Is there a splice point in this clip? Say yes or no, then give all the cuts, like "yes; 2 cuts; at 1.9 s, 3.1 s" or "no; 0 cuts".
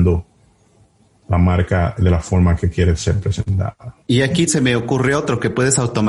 yes; 2 cuts; at 4.0 s, 4.5 s